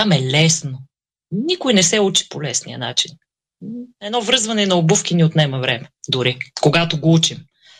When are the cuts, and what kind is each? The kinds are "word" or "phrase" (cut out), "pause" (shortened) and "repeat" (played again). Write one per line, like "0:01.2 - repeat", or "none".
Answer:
0:03.9 - pause
0:06.0 - pause